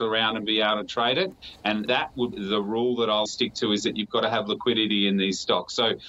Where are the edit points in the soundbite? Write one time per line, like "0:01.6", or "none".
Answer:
0:01.9
0:02.3
0:03.3